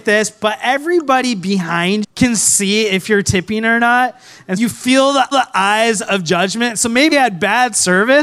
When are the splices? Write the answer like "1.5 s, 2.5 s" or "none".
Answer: 2.0 s, 4.6 s, 5.3 s, 7.1 s

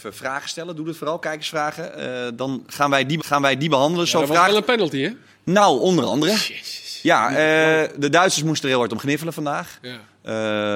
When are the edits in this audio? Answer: 3.2 s

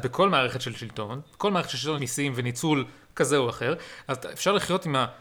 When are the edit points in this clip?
2.0 s

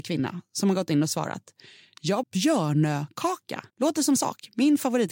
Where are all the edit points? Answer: 2.2 s, 3.7 s, 4.2 s

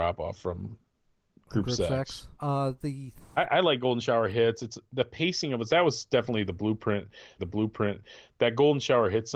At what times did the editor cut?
2.3 s, 5.7 s, 7.4 s

